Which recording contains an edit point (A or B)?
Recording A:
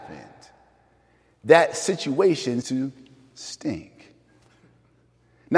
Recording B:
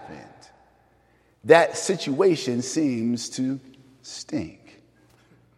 A